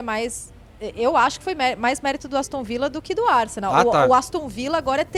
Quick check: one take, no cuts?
yes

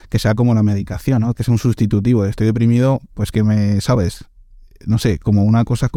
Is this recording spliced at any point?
no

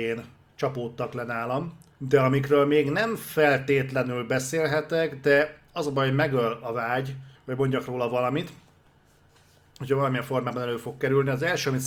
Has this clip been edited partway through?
yes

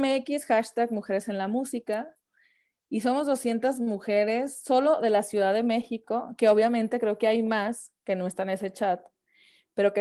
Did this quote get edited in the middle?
no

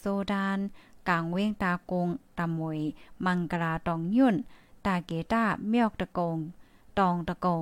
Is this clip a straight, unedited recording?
yes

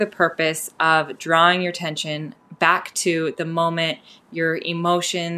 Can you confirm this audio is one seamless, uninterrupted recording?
yes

